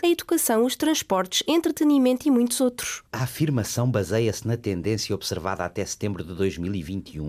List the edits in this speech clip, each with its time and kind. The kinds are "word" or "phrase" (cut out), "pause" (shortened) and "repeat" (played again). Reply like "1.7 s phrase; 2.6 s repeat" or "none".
3.1 s pause